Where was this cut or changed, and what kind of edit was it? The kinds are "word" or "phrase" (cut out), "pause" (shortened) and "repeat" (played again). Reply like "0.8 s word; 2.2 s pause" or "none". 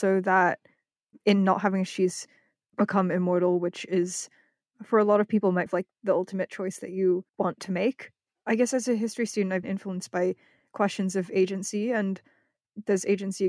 1.9 s word; 5.7 s phrase; 7.3 s pause; 9.6 s word

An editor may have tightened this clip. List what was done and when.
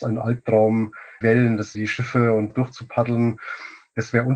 1.2 s word; 1.7 s word; 2.5 s word

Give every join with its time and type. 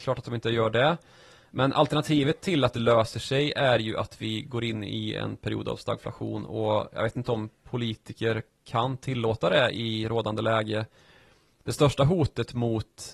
none

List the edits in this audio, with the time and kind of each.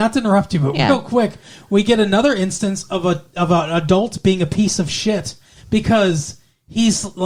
none

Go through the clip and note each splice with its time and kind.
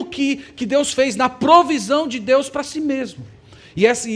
none

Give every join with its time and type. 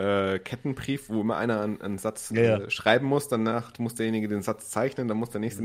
none

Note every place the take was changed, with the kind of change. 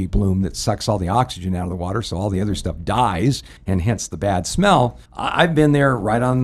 3.6 s pause; 5.1 s pause

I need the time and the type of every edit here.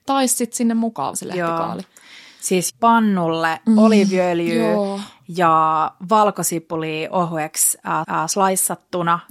1.1 s word; 2.7 s word; 8.0 s repeat

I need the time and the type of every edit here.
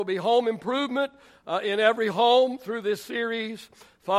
none

